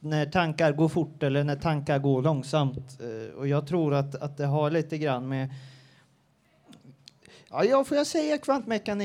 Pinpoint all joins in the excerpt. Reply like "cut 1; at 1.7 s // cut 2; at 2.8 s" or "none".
none